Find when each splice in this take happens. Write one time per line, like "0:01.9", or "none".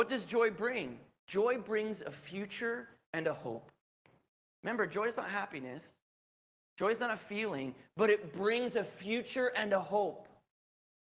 none